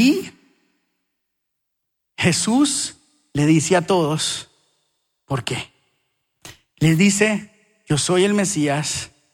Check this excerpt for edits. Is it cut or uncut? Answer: uncut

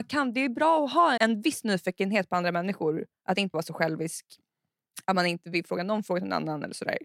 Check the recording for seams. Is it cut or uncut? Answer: cut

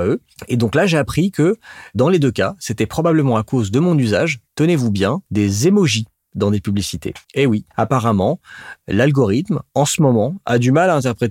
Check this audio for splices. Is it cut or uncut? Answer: cut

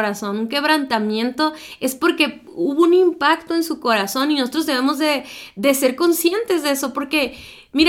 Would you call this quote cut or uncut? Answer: uncut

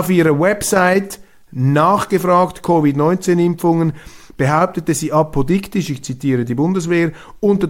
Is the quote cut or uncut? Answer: uncut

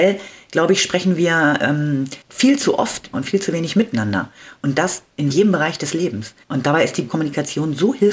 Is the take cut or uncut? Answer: cut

